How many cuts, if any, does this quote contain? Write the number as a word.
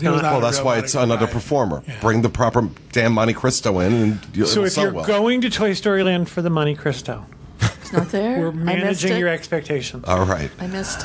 zero